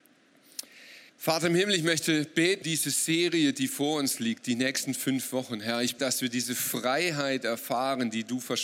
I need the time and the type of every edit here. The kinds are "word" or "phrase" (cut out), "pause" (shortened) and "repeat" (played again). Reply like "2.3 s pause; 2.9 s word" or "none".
1.1 s pause; 2.6 s word; 6.0 s word